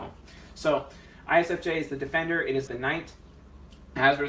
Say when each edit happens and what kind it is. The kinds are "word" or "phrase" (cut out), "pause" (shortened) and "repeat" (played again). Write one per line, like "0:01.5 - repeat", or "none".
0:02.7 - word